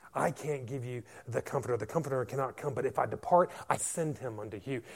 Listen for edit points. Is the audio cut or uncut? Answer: cut